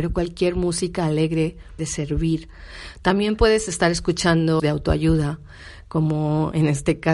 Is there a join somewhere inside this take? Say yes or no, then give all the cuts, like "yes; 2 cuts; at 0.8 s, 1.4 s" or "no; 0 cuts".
yes; 2 cuts; at 1.8 s, 4.6 s